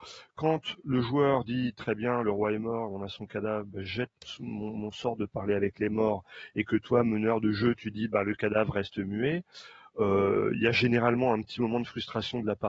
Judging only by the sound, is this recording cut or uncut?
uncut